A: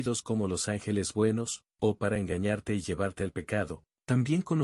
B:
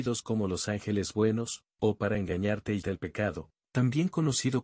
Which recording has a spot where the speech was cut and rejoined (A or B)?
B